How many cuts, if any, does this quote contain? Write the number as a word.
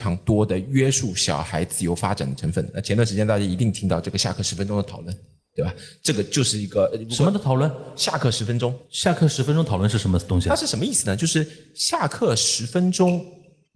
zero